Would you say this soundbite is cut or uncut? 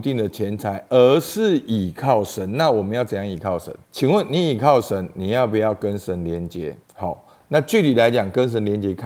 cut